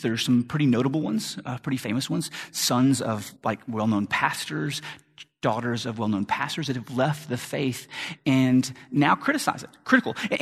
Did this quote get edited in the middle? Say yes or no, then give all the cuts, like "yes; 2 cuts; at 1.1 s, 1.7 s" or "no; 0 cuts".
yes; 1 cut; at 3.4 s